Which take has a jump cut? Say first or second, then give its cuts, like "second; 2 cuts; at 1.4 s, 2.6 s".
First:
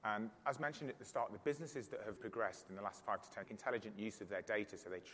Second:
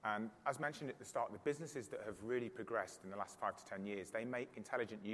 first; 2 cuts; at 2.2 s, 3.4 s